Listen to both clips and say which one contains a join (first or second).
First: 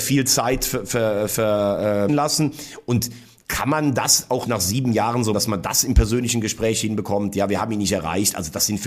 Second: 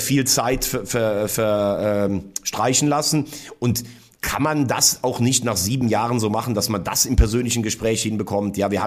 first